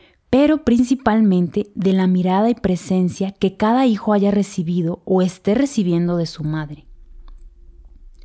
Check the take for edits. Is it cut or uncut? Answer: uncut